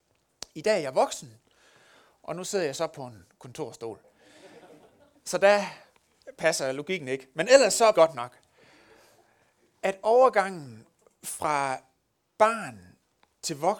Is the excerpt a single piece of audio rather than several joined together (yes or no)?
no